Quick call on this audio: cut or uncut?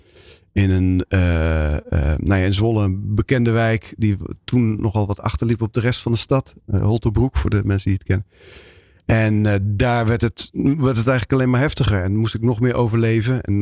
uncut